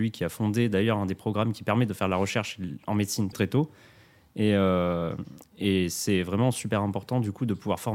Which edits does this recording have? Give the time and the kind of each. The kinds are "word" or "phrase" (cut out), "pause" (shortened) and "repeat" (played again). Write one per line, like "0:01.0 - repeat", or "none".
0:03.3 - word